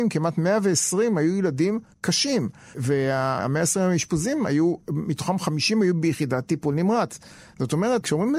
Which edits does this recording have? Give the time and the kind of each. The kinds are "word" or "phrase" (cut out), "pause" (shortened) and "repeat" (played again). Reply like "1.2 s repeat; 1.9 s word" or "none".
none